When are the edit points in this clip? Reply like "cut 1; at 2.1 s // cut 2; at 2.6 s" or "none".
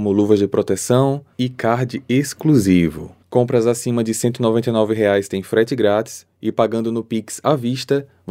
cut 1; at 3.2 s